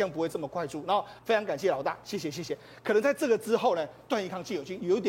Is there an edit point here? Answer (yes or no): yes